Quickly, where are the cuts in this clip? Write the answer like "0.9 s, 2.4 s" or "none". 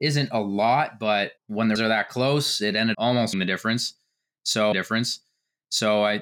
1.4 s, 1.8 s, 2.9 s, 3.3 s, 4.7 s